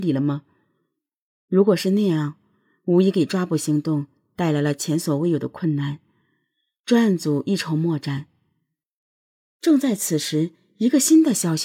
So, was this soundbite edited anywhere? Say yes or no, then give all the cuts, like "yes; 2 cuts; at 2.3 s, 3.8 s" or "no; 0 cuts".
no; 0 cuts